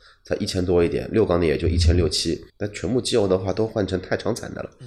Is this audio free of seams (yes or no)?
no